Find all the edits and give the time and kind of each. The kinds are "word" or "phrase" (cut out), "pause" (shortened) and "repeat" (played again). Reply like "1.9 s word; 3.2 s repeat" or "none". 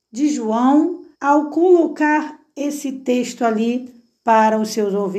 1.1 s pause